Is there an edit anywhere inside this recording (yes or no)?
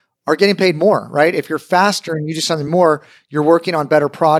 no